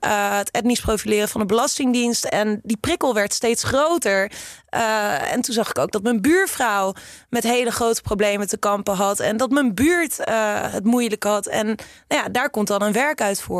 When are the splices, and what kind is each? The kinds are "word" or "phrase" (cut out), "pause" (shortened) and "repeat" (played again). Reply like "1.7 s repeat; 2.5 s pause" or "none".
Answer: none